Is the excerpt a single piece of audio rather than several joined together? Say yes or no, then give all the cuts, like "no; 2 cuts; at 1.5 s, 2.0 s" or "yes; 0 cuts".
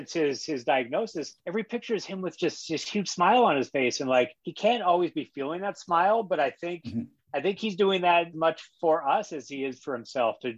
no; 3 cuts; at 1.4 s, 4.4 s, 8.3 s